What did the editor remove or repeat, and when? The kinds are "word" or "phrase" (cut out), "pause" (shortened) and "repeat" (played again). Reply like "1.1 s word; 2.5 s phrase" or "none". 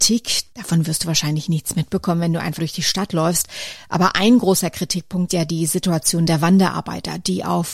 2.6 s word; 5.3 s word